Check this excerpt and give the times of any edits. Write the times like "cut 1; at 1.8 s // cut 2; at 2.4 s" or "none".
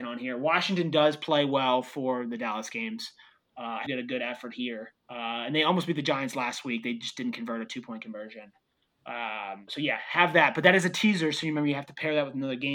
cut 1; at 3.9 s // cut 2; at 5.0 s // cut 3; at 9.7 s